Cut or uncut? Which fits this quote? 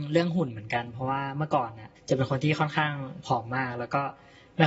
cut